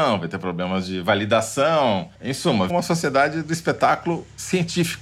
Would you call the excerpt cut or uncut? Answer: cut